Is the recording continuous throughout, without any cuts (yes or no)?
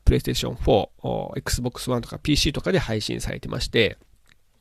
yes